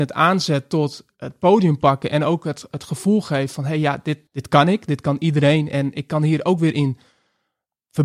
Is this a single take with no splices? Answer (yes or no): no